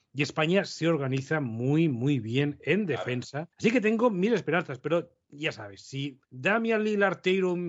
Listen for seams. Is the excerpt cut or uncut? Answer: cut